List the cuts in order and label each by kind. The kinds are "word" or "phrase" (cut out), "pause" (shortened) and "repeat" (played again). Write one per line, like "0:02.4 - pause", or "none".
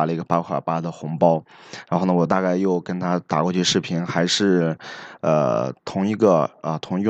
0:05.8 - pause